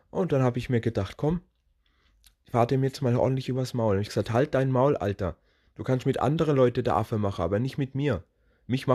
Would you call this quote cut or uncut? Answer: uncut